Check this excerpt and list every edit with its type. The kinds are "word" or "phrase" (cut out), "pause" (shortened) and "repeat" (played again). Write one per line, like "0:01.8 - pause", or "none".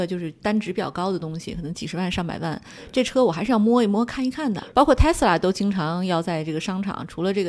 0:04.7 - pause